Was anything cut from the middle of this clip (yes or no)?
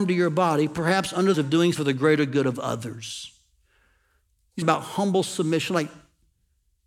yes